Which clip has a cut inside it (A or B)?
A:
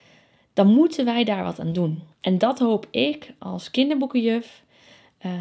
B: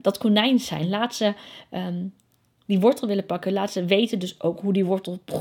A